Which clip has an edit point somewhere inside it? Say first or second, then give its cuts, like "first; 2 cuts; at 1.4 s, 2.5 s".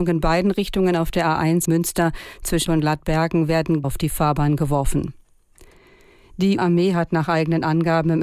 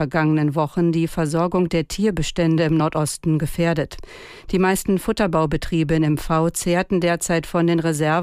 first; 4 cuts; at 1.6 s, 2.7 s, 3.8 s, 6.6 s